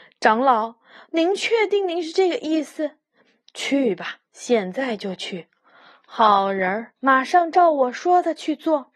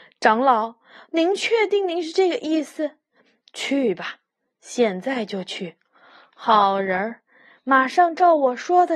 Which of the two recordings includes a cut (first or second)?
first